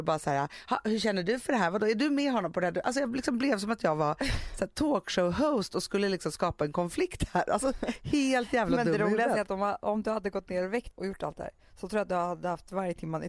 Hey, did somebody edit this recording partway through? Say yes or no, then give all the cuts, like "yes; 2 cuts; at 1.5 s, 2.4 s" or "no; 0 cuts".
yes; 1 cut; at 10.9 s